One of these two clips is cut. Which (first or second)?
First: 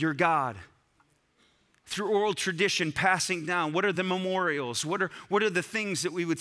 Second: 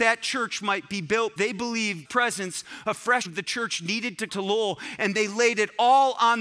second